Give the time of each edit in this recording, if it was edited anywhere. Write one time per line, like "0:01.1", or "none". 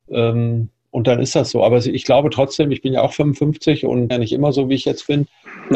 0:04.1